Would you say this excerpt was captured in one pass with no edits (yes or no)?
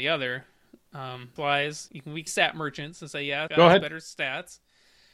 no